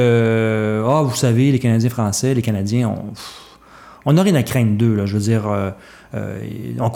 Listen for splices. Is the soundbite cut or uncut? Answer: uncut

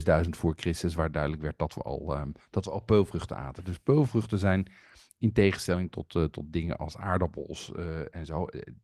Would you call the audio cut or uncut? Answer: uncut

